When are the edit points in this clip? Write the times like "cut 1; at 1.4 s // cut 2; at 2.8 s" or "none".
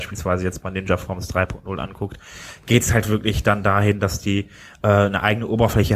none